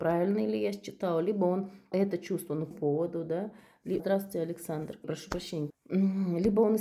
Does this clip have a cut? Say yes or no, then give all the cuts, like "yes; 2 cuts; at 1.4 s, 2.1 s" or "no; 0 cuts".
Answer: yes; 5 cuts; at 1.9 s, 2.7 s, 4.0 s, 5.0 s, 5.7 s